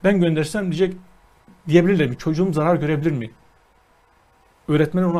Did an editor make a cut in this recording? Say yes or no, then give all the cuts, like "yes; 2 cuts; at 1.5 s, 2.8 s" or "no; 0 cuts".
no; 0 cuts